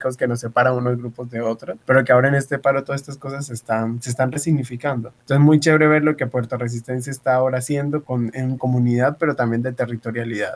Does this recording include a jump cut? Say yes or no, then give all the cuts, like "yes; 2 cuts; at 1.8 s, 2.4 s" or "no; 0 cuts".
yes; 4 cuts; at 1.8 s, 5.2 s, 8.0 s, 8.6 s